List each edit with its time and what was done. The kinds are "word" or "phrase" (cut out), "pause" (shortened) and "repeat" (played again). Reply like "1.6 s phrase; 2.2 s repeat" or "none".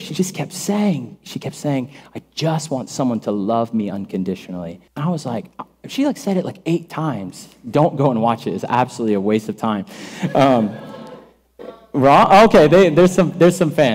4.9 s pause

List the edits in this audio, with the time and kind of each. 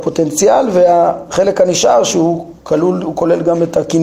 2.6 s pause

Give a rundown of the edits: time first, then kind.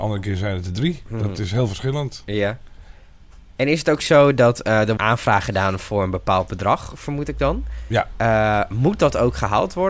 5.0 s word

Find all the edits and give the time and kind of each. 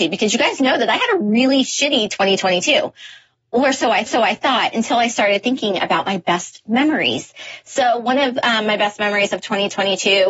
4.1 s repeat

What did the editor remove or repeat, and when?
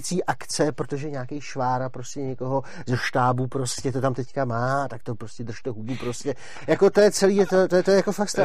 none

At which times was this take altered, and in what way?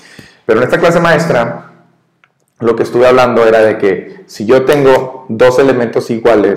none

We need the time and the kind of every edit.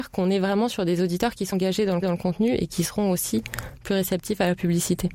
1.5 s word; 2.0 s repeat

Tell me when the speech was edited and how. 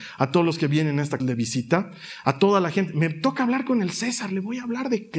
1.2 s word

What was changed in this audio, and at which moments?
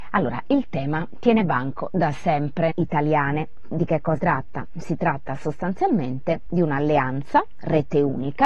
2.7 s phrase; 4.2 s word

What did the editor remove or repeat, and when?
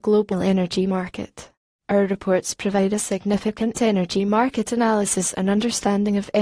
none

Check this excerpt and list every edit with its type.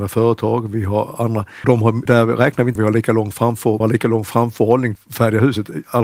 1.6 s word; 2.1 s word; 2.8 s word; 3.8 s word; 5.0 s word

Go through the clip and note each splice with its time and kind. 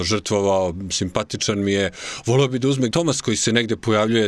2.9 s word

